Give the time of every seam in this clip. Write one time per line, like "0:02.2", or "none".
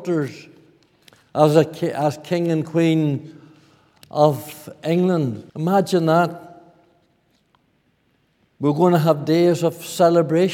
0:05.5